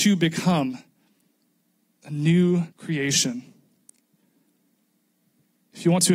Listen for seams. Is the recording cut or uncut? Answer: cut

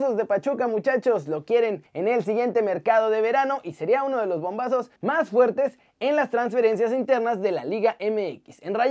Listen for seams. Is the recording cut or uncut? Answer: cut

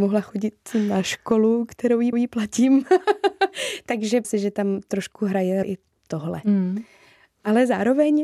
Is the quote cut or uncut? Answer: cut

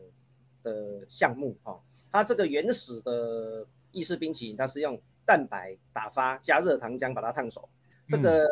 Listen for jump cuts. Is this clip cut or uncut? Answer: uncut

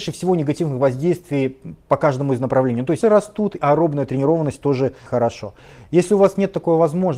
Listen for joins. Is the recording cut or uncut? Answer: cut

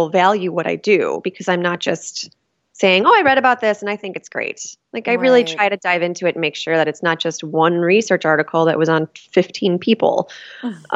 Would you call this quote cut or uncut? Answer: cut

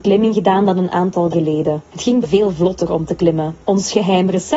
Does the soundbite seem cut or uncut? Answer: cut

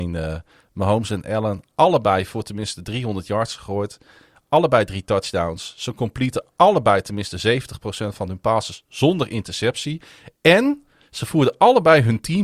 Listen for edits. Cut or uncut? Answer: uncut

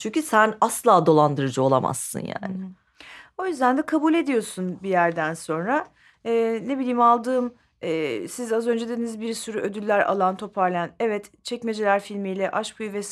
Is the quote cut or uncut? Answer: uncut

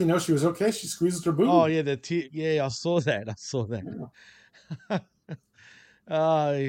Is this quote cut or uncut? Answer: uncut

